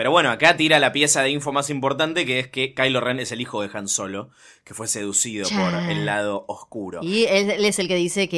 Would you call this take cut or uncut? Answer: uncut